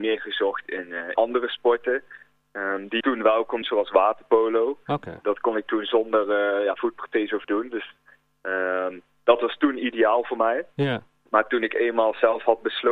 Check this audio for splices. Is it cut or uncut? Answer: cut